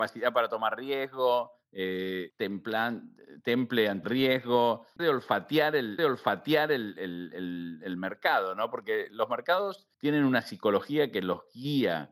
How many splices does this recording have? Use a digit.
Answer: 5